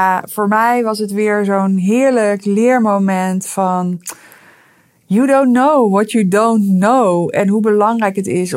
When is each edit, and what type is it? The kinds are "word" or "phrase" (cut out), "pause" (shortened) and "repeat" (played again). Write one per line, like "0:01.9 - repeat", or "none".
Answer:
none